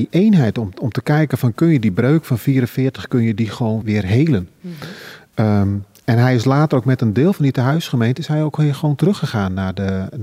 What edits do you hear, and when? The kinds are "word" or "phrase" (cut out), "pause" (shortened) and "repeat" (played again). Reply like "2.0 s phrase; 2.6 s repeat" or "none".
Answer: 3.8 s word